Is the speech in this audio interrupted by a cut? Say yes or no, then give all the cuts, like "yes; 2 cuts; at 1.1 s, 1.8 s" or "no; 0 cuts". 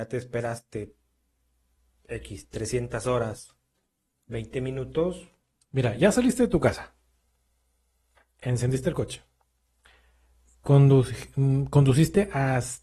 no; 0 cuts